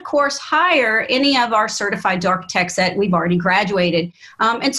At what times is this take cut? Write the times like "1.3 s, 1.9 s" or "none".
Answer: none